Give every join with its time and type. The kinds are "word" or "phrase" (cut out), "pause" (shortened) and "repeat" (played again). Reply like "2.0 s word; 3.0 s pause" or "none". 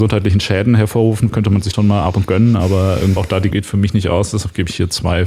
1.3 s word; 1.7 s word; 2.2 s word; 3.2 s word; 3.5 s word